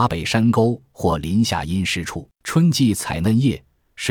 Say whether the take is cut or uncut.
cut